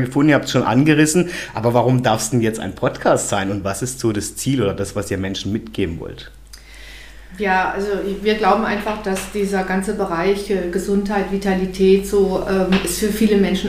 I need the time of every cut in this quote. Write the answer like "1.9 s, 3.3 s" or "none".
none